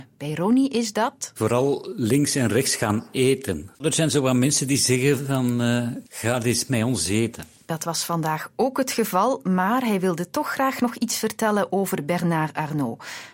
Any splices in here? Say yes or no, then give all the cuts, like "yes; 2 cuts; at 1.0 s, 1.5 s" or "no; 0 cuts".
yes; 2 cuts; at 3.8 s, 6.1 s